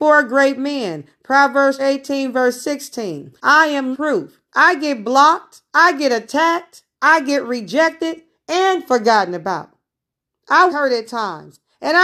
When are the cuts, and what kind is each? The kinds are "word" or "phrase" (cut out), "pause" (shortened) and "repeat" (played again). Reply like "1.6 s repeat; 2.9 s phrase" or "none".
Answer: 1.8 s word; 3.4 s pause; 3.9 s word; 4.5 s pause; 5.7 s pause; 6.9 s pause; 10.7 s word